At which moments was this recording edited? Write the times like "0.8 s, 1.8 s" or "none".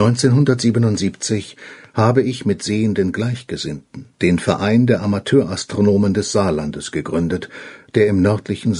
4.1 s